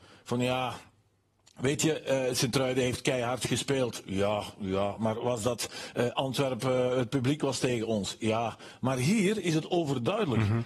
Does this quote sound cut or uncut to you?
uncut